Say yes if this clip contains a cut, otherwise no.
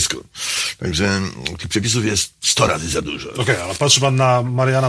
no